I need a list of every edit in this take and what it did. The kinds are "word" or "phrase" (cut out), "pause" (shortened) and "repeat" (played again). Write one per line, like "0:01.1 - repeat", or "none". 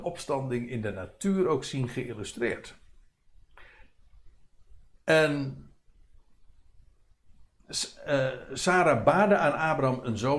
none